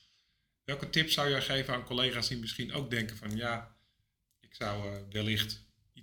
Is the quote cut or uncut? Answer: uncut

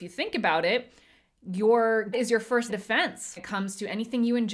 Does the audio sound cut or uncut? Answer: cut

